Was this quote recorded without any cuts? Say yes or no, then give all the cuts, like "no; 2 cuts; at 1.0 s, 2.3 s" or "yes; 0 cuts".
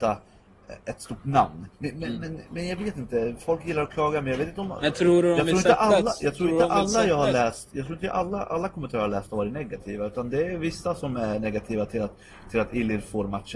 no; 1 cut; at 1.7 s